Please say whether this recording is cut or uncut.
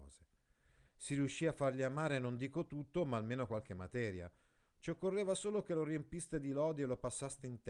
uncut